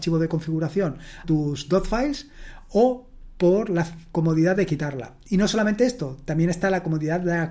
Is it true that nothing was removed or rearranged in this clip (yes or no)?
no